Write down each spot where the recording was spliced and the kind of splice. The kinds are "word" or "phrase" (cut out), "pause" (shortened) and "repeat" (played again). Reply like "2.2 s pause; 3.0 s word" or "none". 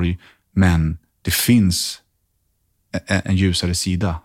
3.2 s word